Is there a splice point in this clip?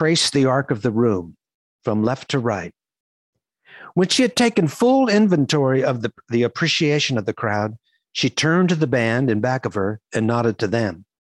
no; 0 cuts

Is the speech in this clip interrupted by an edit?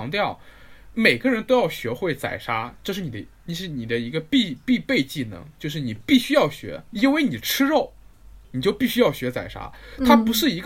yes; 2 cuts; at 6.9 s, 8.4 s

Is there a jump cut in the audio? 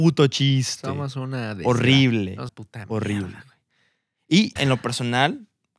yes; 2 cuts; at 2.5 s, 4.6 s

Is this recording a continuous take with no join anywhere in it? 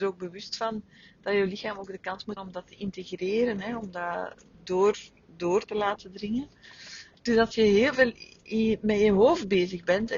no; 2 cuts; at 2.4 s, 4.5 s

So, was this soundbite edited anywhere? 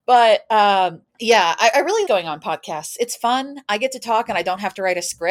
yes; 2 cuts; at 1.1 s, 2.1 s

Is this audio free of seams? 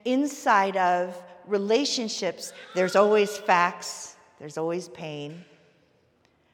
yes; 0 cuts

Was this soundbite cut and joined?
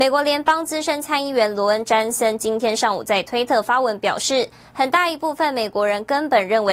no; 0 cuts

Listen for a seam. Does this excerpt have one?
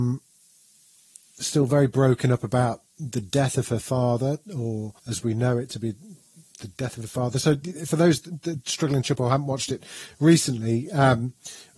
yes; 2 cuts; at 5.0 s, 9.0 s

